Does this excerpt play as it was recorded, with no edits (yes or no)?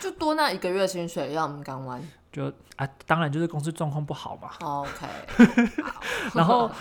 yes